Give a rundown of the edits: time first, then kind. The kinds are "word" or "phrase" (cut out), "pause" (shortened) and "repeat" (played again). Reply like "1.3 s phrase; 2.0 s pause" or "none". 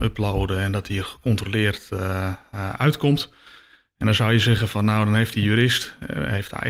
none